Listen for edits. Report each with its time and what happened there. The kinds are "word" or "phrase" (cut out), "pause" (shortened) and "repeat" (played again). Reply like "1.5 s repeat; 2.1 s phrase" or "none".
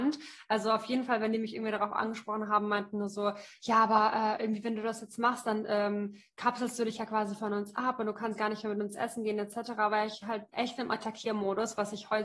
10.5 s pause